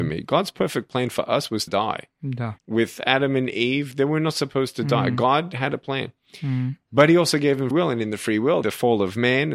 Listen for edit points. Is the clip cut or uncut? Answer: cut